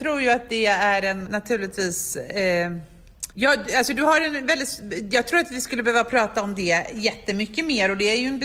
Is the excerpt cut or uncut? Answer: cut